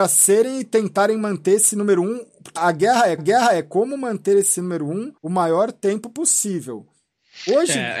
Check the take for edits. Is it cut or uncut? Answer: cut